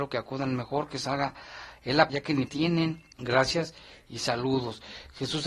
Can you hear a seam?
yes; 3 cuts; at 2.1 s, 2.5 s, 3.1 s

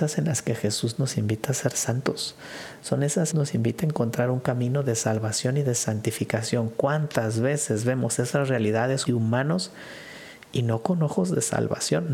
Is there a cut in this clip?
yes; 2 cuts; at 3.3 s, 9.1 s

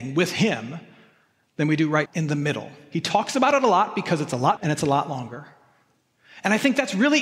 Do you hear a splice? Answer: yes; 2 cuts; at 2.1 s, 4.6 s

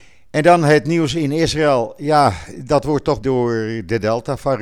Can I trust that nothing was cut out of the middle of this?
no; 1 cut; at 3.2 s

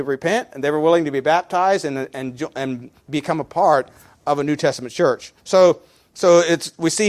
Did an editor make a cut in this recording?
yes; 1 cut; at 5.4 s

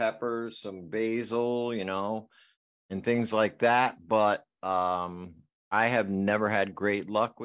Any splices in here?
no; 0 cuts

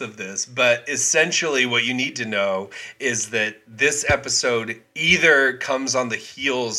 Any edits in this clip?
no; 0 cuts

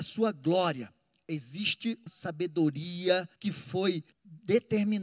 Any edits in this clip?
yes; 3 cuts; at 2.1 s, 3.3 s, 4.1 s

